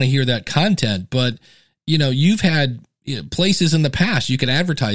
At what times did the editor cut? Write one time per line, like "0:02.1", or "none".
none